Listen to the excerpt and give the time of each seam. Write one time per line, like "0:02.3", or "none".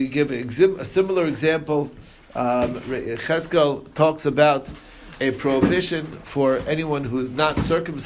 none